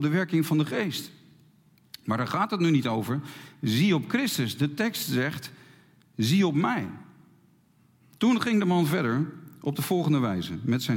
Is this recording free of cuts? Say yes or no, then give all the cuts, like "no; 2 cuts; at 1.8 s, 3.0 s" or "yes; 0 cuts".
yes; 0 cuts